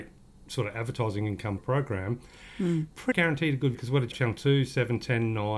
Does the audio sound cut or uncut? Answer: cut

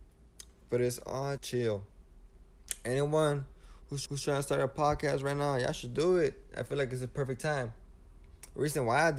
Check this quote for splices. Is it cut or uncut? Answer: cut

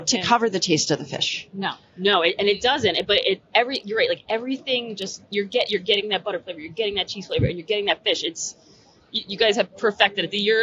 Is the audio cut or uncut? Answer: cut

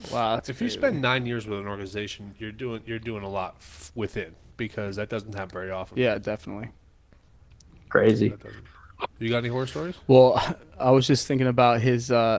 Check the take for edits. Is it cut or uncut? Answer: cut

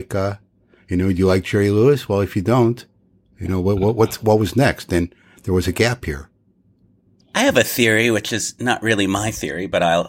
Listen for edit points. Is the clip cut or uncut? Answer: uncut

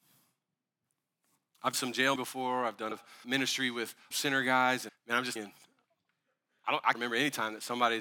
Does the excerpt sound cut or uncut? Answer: cut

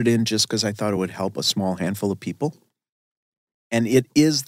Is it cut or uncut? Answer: uncut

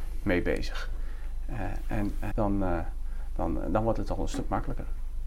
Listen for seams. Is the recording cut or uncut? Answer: cut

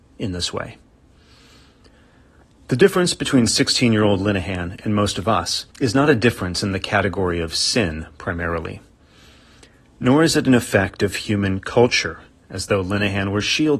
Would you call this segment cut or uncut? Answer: cut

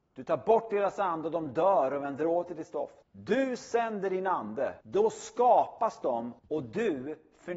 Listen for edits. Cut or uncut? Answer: cut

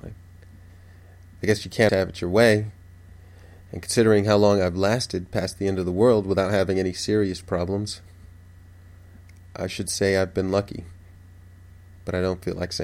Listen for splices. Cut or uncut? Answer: cut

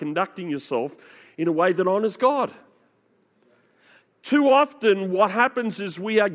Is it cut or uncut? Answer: uncut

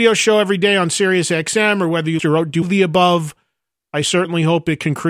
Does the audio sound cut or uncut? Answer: cut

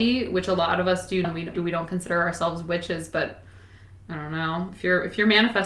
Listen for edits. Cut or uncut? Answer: cut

